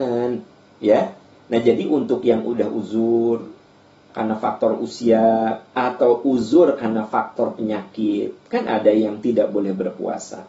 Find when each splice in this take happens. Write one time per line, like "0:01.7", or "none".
none

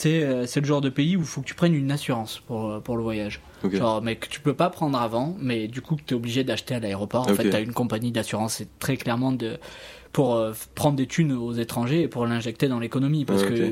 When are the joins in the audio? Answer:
none

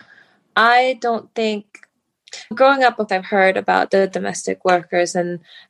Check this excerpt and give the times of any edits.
0:02.5
0:03.1

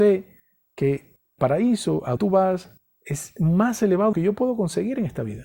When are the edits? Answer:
0:01.4
0:02.2
0:04.1

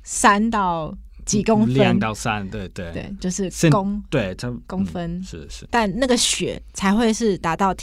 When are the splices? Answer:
0:03.2
0:05.7

